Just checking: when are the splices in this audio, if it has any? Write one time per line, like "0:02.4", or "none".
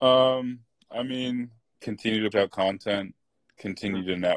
0:01.8
0:02.3

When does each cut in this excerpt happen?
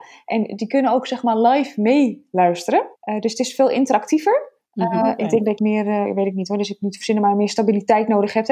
0:03.0
0:04.6
0:05.6

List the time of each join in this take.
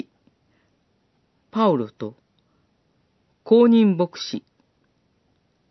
none

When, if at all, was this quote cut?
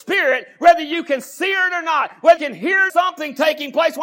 0:02.4
0:02.9

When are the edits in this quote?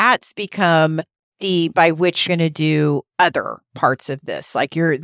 0:01.7
0:02.3

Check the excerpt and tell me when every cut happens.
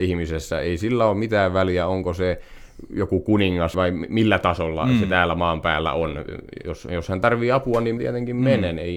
0:03.7
0:08.0

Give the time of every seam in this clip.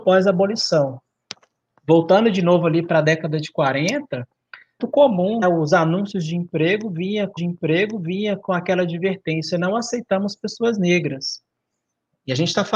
0:04.8
0:05.4
0:07.4

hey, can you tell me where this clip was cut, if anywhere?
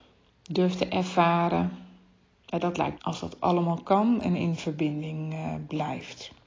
0:03.0

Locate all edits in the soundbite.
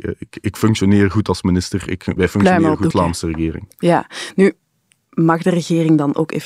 0:02.2
0:02.9

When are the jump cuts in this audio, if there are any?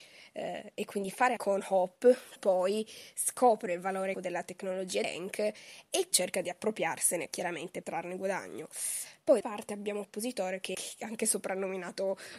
0:01.4
0:02.4
0:04.1
0:05.0
0:06.1
0:07.8
0:09.4
0:10.0
0:10.7

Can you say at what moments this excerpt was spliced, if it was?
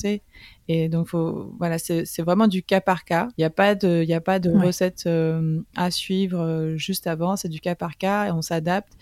0:03.3

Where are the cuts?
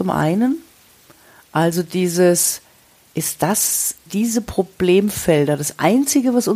0:04.1

